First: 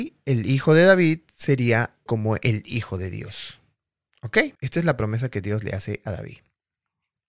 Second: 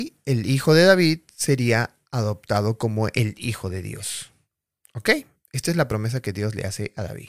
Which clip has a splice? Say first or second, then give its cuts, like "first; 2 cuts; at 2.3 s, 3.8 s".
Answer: first; 2 cuts; at 2.1 s, 4.5 s